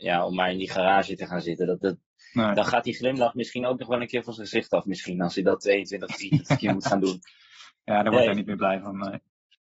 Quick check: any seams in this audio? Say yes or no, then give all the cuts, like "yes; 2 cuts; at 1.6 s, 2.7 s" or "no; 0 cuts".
no; 0 cuts